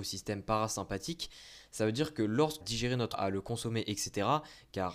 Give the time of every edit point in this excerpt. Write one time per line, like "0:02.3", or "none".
0:02.6
0:03.1